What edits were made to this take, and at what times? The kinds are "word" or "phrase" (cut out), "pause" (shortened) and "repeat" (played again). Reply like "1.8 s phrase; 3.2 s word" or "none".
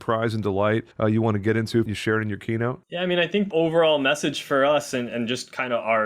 0.9 s pause; 1.9 s phrase; 2.8 s pause; 3.5 s word